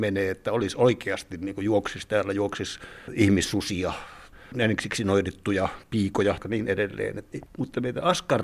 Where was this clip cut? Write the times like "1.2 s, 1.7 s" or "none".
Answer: 6.4 s, 7.3 s